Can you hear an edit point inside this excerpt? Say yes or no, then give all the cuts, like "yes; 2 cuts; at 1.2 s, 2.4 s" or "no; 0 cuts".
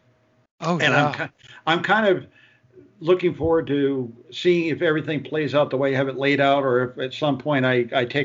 no; 0 cuts